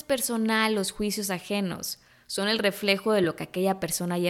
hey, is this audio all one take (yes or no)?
yes